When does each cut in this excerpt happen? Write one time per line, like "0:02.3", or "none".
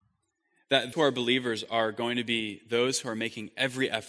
0:00.9